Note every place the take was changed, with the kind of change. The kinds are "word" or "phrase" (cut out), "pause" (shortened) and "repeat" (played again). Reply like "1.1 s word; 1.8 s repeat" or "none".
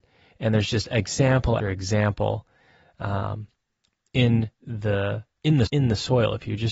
1.6 s word; 4.5 s pause; 5.7 s phrase